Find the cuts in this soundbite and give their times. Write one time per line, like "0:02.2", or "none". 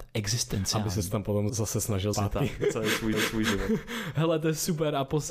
0:01.5
0:02.1
0:03.1